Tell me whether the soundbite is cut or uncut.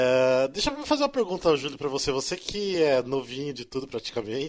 uncut